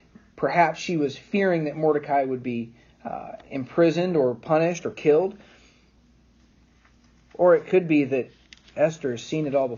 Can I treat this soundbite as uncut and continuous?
yes; 0 cuts

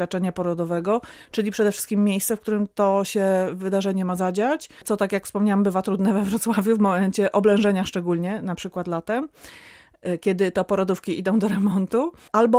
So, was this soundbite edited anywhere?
no; 0 cuts

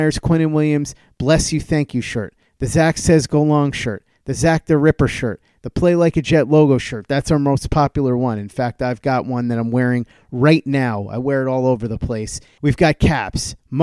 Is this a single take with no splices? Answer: yes; 0 cuts

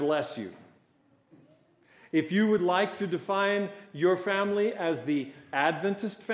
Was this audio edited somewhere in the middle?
no; 0 cuts

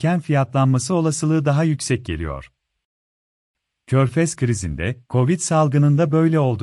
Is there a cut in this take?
no; 0 cuts

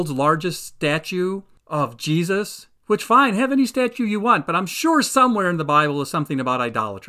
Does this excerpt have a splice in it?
yes; 1 cut; at 2.8 s

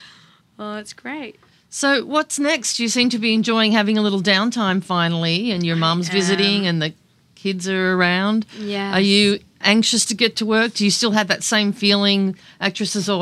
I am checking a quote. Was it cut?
no; 0 cuts

